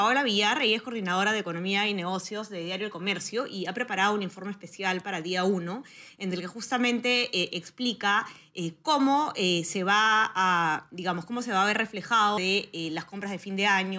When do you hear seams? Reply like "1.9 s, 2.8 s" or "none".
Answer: 12.4 s